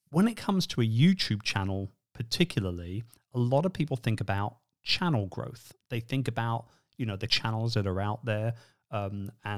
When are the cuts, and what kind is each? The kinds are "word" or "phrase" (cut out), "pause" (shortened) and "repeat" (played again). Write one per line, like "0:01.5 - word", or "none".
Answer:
0:07.3 - word